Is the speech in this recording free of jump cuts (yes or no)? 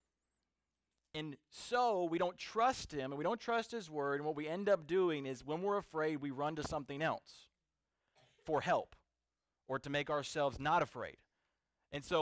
yes